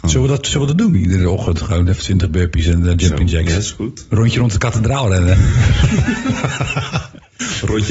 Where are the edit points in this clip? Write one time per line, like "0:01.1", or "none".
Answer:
none